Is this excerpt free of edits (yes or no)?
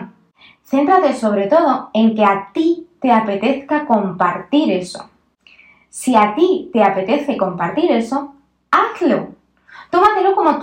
yes